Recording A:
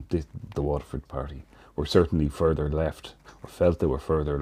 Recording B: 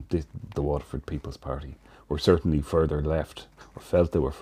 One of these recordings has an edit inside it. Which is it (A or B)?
A